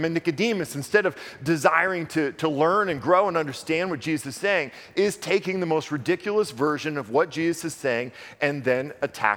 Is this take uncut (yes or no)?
yes